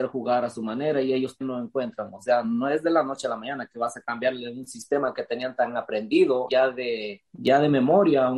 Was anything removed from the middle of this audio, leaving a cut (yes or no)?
yes